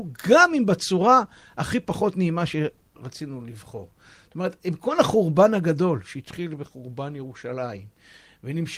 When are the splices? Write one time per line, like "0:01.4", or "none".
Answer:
none